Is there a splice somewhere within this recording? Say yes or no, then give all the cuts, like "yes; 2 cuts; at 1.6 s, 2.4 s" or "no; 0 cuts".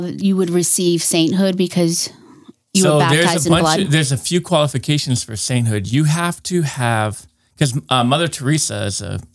no; 0 cuts